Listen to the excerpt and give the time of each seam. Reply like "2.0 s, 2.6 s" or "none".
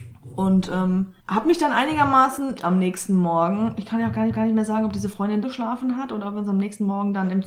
1.2 s, 2.6 s, 4.3 s, 5.4 s